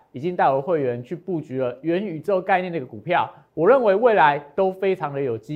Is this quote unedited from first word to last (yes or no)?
yes